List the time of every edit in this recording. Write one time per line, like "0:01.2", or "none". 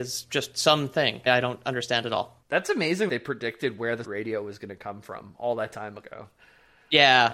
0:01.3
0:03.1
0:04.0